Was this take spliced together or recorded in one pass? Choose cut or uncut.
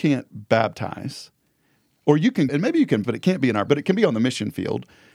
cut